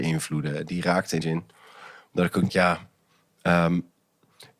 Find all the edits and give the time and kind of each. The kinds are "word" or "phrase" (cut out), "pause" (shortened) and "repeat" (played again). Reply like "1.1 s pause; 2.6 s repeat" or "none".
1.2 s word; 2.5 s word